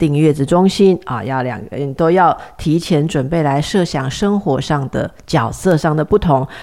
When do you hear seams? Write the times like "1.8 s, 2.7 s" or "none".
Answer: none